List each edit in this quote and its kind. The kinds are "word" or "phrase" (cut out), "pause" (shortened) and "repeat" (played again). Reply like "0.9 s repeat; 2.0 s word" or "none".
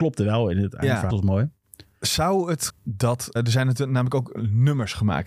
1.1 s word; 2.7 s word; 3.4 s word